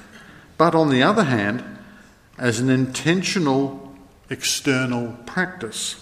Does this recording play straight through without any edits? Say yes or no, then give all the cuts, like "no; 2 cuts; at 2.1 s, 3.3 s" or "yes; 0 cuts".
yes; 0 cuts